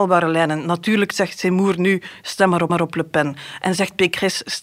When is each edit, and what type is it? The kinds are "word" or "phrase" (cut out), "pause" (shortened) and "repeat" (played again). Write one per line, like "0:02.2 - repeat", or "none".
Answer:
0:02.7 - repeat

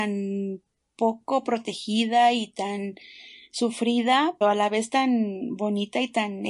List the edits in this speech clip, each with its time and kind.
0:04.4 - word

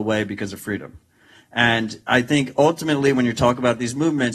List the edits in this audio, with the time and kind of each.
none

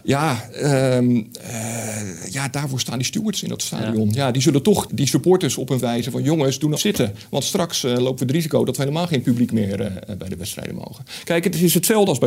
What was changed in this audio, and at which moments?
0:04.9 - word
0:05.8 - word
0:06.8 - phrase

